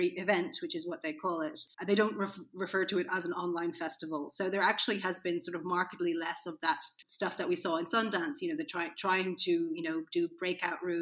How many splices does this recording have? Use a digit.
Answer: 1